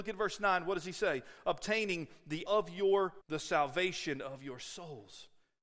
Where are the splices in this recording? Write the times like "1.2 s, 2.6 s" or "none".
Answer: 2.5 s, 3.2 s